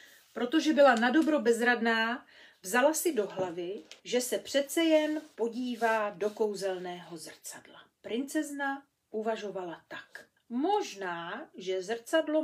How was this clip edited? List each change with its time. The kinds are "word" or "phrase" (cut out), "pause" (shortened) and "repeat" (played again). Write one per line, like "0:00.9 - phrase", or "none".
0:04.0 - pause
0:07.9 - pause
0:10.4 - pause